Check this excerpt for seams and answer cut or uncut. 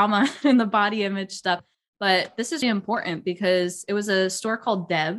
cut